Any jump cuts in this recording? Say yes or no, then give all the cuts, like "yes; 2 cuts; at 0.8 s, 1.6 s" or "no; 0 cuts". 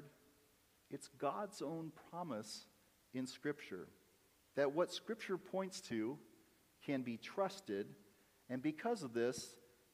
no; 0 cuts